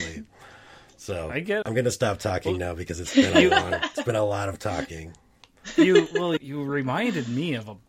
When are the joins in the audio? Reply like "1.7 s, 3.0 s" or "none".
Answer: 1.6 s, 6.4 s